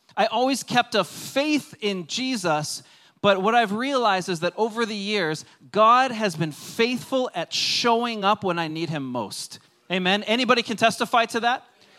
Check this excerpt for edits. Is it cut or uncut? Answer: uncut